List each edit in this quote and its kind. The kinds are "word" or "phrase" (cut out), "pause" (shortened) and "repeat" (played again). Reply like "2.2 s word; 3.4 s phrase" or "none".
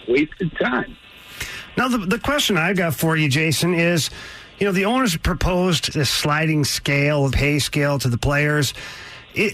5.9 s word; 7.3 s word